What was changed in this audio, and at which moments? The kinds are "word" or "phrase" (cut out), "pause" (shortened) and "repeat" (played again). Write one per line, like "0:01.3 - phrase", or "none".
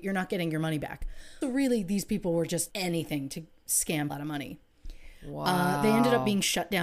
0:01.4 - word
0:02.7 - word
0:04.1 - word